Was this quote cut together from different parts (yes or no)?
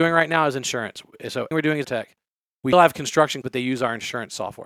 yes